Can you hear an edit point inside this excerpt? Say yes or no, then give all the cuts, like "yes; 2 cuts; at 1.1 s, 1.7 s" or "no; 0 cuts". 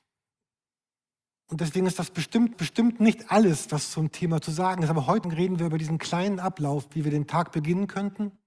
yes; 2 cuts; at 2.5 s, 5.2 s